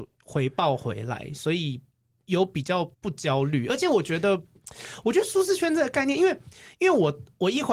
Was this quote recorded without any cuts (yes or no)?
no